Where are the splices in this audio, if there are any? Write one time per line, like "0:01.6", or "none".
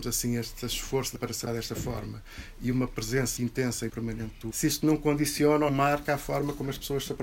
0:01.2
0:01.5
0:03.4
0:03.9
0:04.5
0:05.7